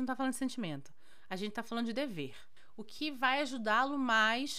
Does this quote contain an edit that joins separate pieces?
no; 0 cuts

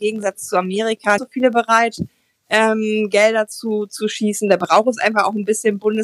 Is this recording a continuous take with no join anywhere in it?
no; 1 cut; at 1.2 s

